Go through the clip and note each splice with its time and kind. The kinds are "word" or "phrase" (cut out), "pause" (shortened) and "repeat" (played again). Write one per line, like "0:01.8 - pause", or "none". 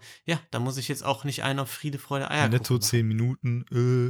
none